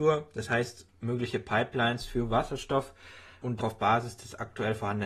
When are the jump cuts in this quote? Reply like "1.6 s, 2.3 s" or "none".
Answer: 3.6 s